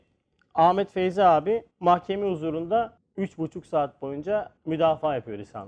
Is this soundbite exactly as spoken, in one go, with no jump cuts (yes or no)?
no